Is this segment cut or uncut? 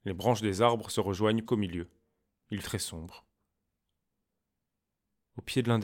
cut